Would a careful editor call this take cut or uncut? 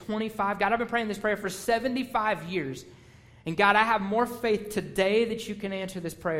uncut